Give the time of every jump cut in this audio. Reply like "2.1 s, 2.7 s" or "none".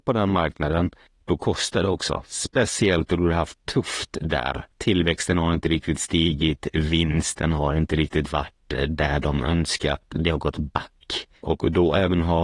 1.1 s, 4.7 s, 11.4 s

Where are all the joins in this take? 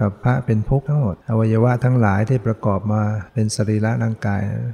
1.2 s, 3.3 s

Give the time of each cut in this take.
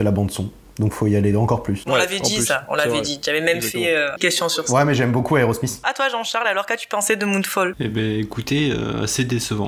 none

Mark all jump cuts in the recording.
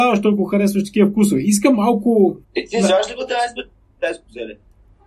2.4 s

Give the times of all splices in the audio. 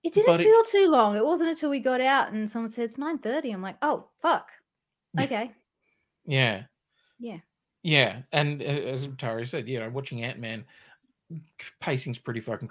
none

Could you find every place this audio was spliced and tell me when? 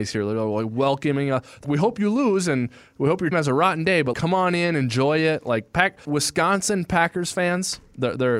1.6 s, 3.3 s, 4.1 s, 6.0 s

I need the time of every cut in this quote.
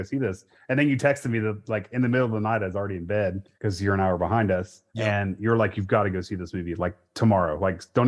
3.5 s, 4.9 s

